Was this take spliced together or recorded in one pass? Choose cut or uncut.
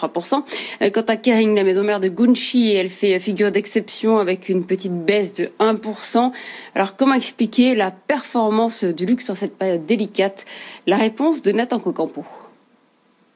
uncut